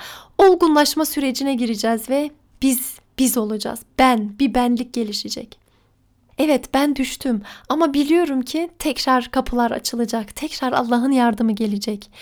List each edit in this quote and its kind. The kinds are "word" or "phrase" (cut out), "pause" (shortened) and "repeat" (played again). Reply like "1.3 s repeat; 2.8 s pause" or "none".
none